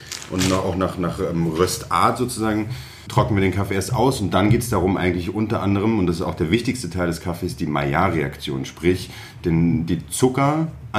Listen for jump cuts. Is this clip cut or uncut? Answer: uncut